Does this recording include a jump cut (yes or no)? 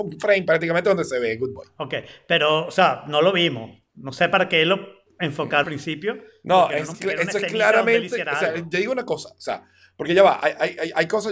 yes